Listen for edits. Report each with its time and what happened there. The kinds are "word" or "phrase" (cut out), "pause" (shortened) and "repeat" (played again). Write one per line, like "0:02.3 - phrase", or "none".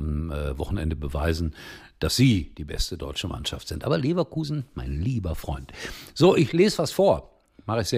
none